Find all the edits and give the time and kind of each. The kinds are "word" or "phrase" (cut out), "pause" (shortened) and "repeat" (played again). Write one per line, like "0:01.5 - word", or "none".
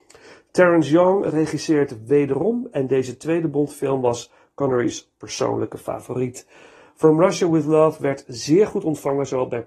none